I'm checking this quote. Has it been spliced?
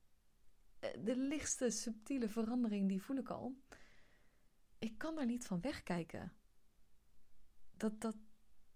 no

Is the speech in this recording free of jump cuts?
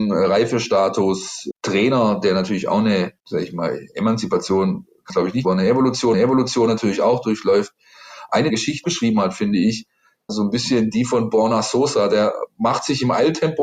no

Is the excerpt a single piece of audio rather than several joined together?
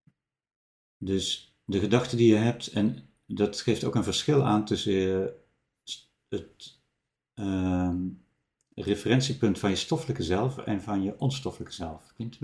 yes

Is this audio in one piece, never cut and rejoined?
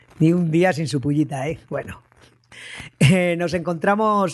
yes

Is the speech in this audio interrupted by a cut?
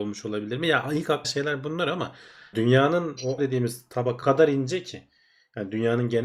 yes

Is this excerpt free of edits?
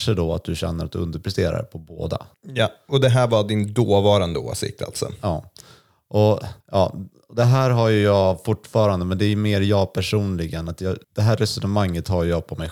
no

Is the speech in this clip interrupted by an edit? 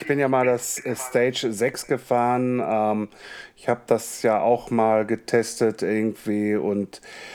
no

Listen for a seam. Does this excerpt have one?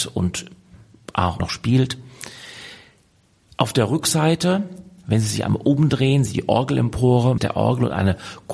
yes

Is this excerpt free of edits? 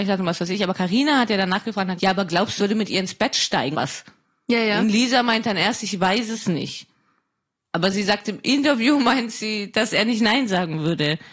no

